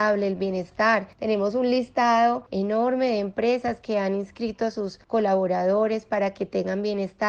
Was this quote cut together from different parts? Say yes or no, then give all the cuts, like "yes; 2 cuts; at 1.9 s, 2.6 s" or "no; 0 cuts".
no; 0 cuts